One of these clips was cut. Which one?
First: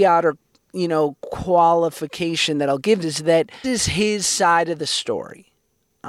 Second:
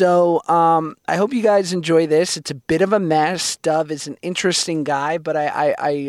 first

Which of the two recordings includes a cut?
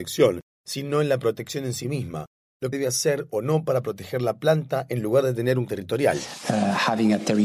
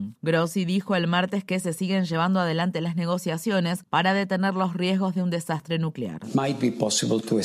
first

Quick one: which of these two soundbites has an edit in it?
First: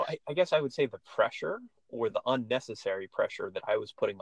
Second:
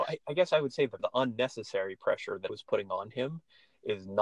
second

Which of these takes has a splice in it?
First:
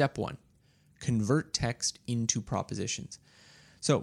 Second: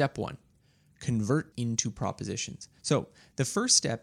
second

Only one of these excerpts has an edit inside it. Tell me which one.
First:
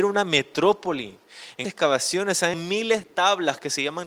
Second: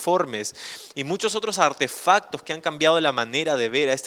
first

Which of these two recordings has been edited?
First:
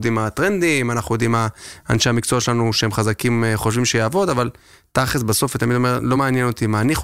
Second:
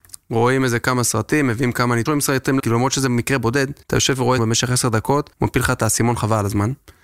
second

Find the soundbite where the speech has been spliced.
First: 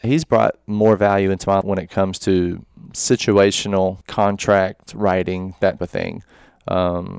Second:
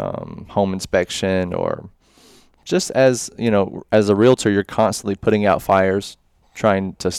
first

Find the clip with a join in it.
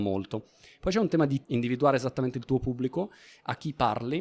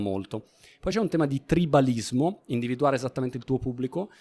first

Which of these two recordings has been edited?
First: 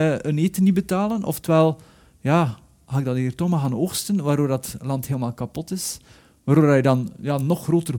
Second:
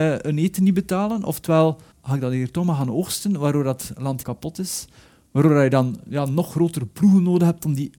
second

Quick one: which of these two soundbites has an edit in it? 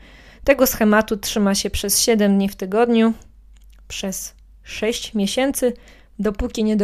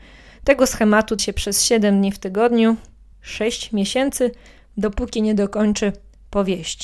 second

